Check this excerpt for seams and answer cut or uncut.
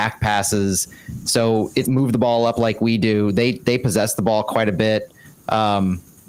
cut